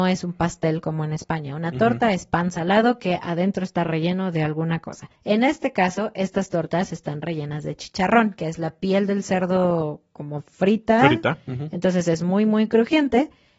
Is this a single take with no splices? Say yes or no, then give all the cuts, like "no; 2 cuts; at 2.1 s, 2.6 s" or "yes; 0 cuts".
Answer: no; 1 cut; at 5.2 s